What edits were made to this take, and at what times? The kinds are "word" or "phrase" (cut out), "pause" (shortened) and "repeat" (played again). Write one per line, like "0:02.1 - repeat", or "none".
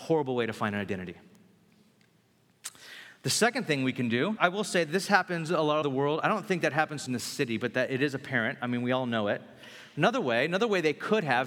0:04.4 - word
0:05.8 - word
0:07.1 - word